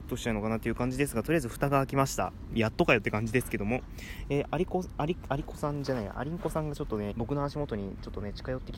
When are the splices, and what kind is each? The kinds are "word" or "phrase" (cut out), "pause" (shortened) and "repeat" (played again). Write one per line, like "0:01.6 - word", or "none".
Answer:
0:04.4 - phrase
0:07.1 - word

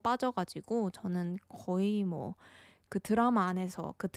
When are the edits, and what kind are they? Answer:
none

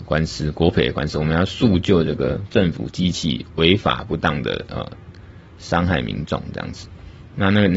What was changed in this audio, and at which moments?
none

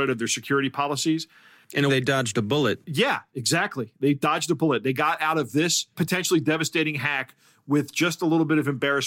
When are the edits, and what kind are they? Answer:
0:01.9 - word
0:05.9 - word

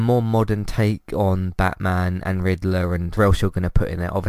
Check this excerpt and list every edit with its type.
0:03.2 - word

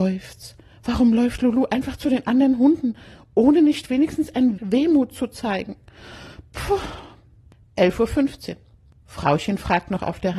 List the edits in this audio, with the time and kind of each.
0:04.6 - word

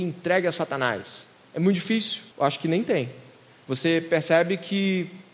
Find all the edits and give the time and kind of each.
0:02.3 - pause

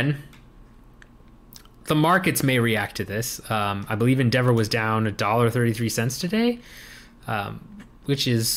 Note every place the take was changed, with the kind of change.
none

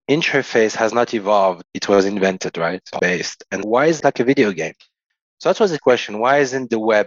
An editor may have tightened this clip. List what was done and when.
0:01.6 - word
0:03.0 - word
0:03.6 - word
0:04.0 - word
0:05.8 - word

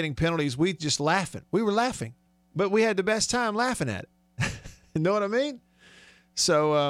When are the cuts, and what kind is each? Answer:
0:02.3 - pause

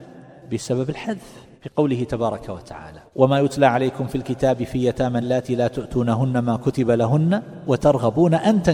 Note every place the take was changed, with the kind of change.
0:01.5 - pause
0:03.1 - pause
0:05.2 - word

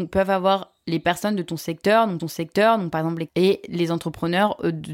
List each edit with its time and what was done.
0:02.2 - repeat
0:03.3 - word

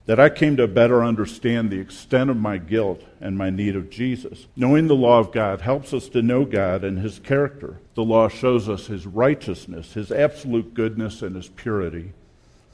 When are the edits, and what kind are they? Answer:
0:04.5 - pause
0:07.9 - pause

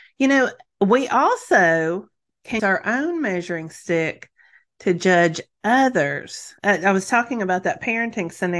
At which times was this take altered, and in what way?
0:02.6 - word
0:06.6 - pause

